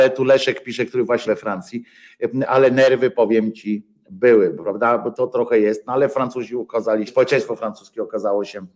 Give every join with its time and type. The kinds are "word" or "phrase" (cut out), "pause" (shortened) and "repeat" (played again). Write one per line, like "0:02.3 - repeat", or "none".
0:01.2 - word
0:05.1 - word
0:07.1 - word